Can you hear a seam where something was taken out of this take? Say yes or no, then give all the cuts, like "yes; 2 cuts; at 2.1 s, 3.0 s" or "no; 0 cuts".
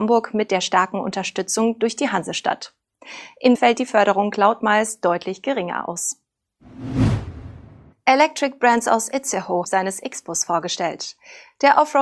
yes; 3 cuts; at 3.5 s, 7.9 s, 9.6 s